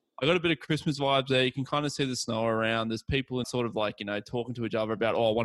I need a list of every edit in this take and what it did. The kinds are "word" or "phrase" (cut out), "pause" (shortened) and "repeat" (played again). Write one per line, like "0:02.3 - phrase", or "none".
0:03.4 - phrase

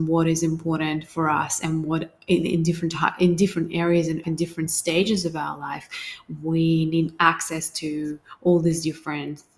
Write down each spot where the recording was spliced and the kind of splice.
0:04.2 - phrase

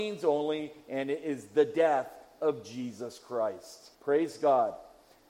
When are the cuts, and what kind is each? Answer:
0:03.9 - pause

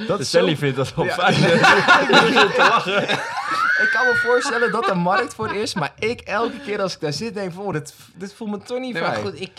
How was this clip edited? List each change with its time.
none

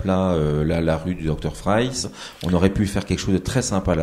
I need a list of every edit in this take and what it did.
none

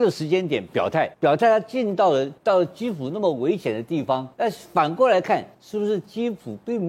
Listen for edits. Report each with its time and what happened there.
0:01.1 - pause
0:02.4 - pause
0:04.3 - pause
0:05.5 - pause

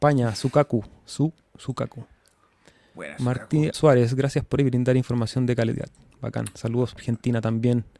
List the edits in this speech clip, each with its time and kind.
0:03.7 - word
0:04.6 - word
0:07.0 - word

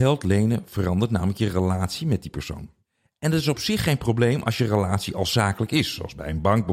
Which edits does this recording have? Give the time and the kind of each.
none

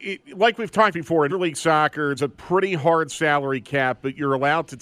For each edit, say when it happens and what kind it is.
0:00.9 - word
0:01.3 - word
0:02.2 - word

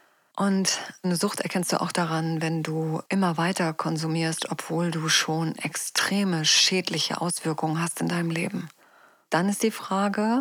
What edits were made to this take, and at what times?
0:03.1 - pause
0:08.8 - pause

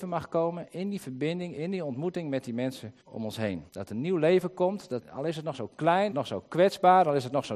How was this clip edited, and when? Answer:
0:03.0 - pause
0:03.7 - pause
0:05.0 - word
0:06.1 - phrase

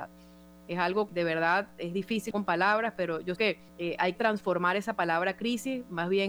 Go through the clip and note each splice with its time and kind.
0:01.1 - word
0:02.3 - word
0:03.4 - word
0:03.7 - pause
0:04.1 - word

